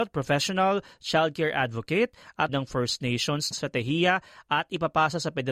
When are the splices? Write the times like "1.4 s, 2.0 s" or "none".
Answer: 2.5 s, 3.5 s